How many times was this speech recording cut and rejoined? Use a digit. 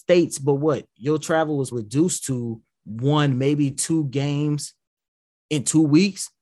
1